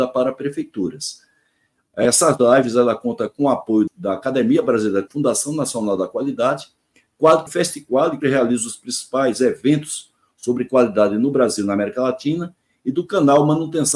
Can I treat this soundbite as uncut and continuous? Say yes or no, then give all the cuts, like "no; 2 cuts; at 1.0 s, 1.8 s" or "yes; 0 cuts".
no; 4 cuts; at 3.9 s, 5.1 s, 7.5 s, 8.2 s